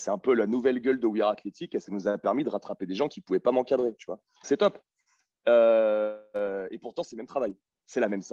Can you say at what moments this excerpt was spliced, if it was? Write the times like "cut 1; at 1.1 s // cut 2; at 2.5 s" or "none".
cut 1; at 4.4 s